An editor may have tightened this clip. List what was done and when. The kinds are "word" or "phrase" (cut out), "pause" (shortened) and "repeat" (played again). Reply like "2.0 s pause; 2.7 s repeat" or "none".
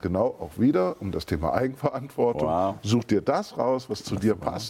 none